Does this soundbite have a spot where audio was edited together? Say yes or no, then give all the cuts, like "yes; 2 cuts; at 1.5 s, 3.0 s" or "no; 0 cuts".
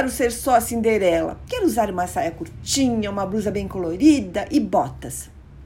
no; 0 cuts